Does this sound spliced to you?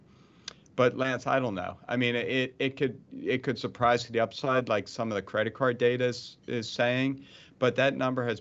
no; 0 cuts

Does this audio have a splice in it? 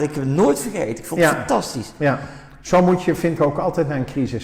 yes; 1 cut; at 3.4 s

